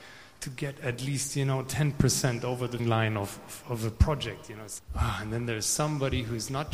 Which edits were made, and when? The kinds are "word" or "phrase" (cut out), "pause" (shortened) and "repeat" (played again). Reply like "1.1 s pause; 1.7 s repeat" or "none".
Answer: 2.8 s word; 3.6 s word; 4.8 s word